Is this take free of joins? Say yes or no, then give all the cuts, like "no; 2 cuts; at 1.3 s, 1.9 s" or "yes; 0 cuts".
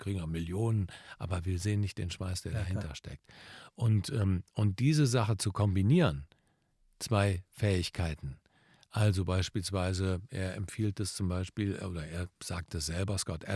yes; 0 cuts